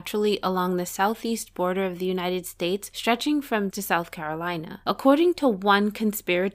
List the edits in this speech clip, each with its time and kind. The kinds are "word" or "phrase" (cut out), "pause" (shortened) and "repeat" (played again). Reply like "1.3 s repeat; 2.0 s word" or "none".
3.7 s word